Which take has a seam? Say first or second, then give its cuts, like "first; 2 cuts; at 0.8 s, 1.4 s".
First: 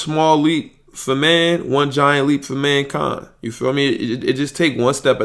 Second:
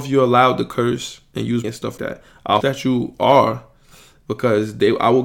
second; 3 cuts; at 1.6 s, 2.0 s, 2.6 s